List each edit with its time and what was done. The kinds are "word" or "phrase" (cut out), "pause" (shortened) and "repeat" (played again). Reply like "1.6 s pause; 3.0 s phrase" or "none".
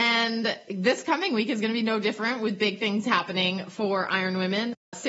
none